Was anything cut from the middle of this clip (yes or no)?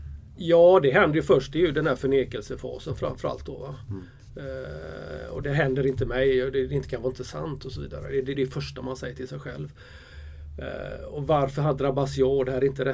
yes